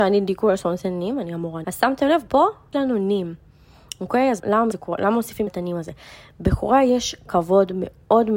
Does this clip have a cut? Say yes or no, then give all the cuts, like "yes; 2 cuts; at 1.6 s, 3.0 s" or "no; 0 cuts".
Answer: yes; 6 cuts; at 1.6 s, 2.3 s, 2.7 s, 4.4 s, 4.7 s, 5.5 s